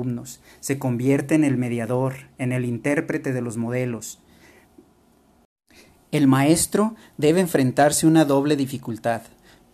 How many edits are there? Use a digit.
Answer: 0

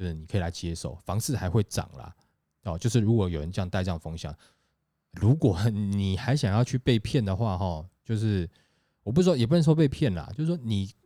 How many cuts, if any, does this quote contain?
1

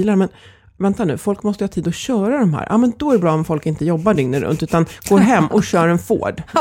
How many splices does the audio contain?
0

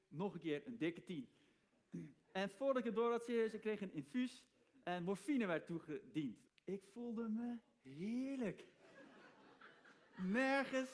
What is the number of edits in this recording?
1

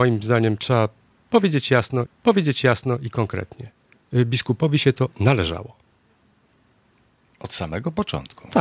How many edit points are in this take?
1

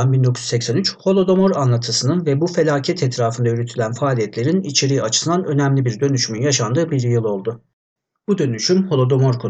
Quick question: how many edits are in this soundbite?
0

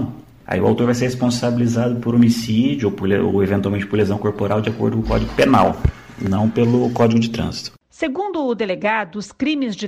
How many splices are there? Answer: 0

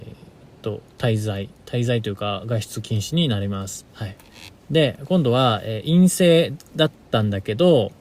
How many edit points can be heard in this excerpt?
2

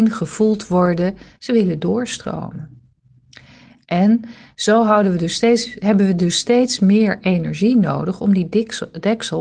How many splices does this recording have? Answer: 0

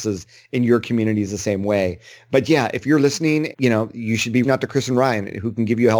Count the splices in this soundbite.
3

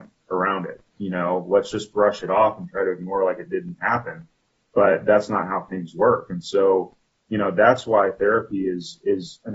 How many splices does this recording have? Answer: 0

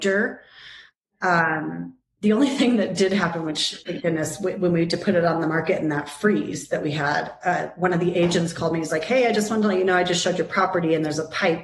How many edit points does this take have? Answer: 0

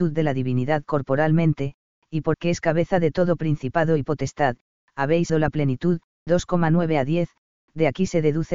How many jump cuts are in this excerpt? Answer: 3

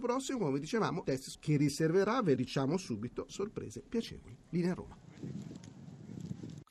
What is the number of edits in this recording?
4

